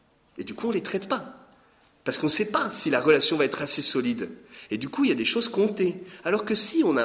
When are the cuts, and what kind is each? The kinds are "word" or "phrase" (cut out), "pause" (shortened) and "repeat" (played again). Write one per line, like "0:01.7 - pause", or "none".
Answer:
none